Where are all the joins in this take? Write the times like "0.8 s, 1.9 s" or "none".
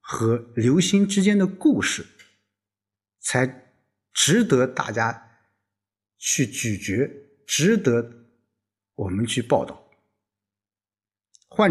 none